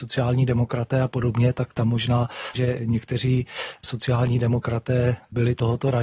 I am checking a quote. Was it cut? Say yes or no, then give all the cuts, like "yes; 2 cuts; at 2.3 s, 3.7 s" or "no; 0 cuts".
yes; 1 cut; at 2.5 s